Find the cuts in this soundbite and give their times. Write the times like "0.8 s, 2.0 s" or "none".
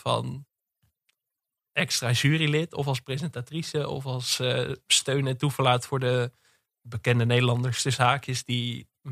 none